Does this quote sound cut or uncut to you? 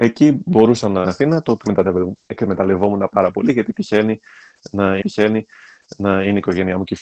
cut